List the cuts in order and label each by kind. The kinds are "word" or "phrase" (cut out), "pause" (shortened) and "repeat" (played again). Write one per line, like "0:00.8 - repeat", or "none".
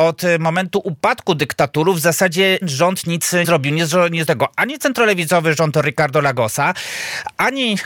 0:02.6 - word
0:03.4 - word
0:04.3 - word